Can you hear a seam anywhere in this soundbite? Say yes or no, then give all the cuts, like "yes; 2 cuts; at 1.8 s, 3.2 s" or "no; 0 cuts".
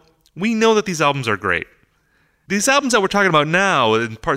no; 0 cuts